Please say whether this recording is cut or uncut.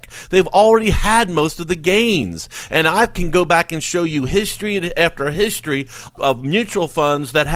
uncut